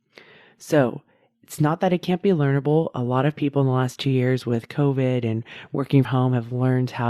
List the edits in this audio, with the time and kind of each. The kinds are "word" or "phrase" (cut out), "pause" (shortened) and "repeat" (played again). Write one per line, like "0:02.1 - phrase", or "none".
0:06.0 - word